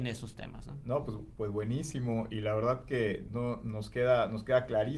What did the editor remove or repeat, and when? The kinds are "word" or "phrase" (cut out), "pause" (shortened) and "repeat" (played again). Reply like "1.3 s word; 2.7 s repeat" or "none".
none